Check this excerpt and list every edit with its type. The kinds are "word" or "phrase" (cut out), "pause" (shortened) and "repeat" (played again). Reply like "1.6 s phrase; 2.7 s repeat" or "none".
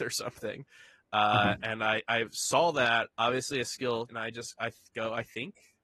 3.1 s pause; 4.1 s word